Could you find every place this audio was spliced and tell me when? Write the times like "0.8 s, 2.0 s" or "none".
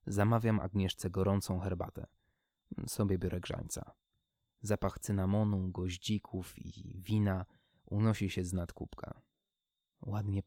none